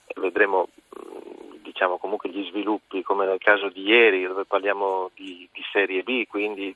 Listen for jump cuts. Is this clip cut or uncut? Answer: uncut